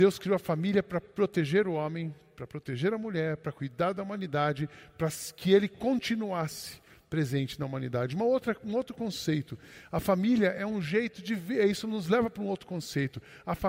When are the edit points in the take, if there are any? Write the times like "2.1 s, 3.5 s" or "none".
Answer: none